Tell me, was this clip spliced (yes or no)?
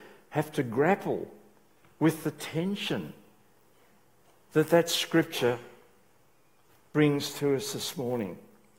no